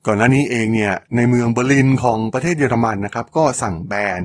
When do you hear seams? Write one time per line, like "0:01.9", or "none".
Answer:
0:01.0